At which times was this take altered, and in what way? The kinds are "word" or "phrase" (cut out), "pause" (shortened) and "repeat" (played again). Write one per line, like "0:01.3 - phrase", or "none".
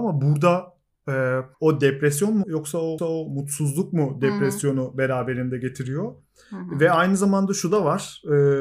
0:01.5 - pause
0:02.4 - phrase
0:03.0 - repeat